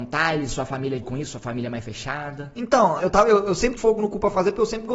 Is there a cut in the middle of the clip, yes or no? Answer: yes